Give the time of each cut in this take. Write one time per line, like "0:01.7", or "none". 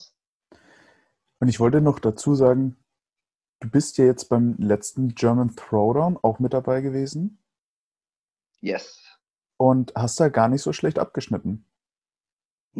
none